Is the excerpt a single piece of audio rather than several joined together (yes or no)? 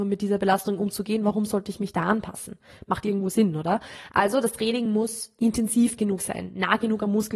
yes